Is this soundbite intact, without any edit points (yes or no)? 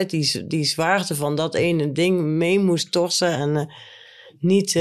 yes